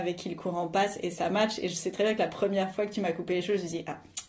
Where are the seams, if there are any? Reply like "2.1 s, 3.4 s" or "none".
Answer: none

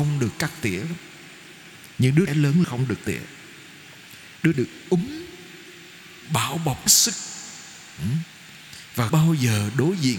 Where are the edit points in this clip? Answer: 2.3 s, 2.6 s, 3.0 s, 4.5 s, 6.2 s, 6.9 s, 9.1 s

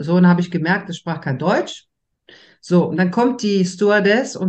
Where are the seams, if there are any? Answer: none

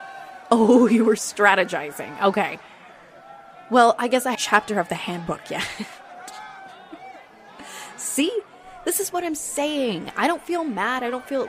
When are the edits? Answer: 4.3 s

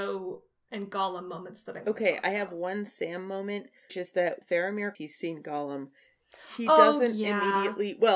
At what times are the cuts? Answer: 3.9 s, 4.4 s, 4.9 s

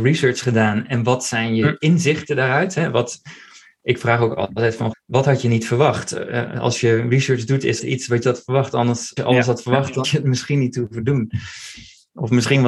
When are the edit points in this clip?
4.9 s, 7.8 s, 8.2 s, 9.2 s, 10.0 s

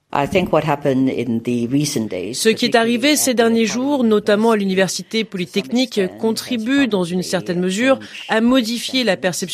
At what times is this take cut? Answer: none

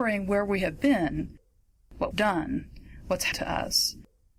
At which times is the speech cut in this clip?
2.1 s, 3.3 s

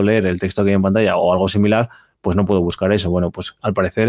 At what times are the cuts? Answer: none

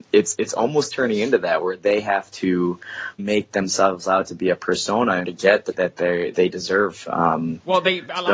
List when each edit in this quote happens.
3.2 s, 5.2 s, 5.7 s

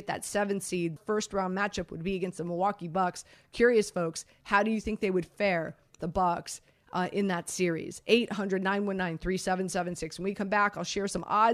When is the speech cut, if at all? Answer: 1.0 s, 6.0 s

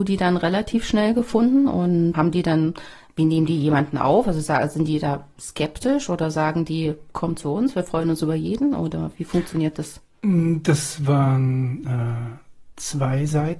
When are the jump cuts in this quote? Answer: 2.1 s

